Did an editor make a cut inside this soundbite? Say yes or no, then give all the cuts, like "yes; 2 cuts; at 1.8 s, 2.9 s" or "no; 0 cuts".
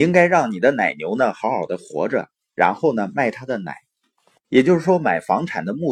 no; 0 cuts